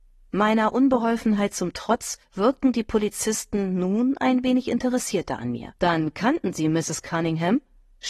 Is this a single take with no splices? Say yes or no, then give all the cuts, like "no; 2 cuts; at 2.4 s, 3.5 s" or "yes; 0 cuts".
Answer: no; 2 cuts; at 2.2 s, 5.8 s